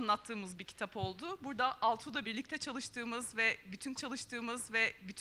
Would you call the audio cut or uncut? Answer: cut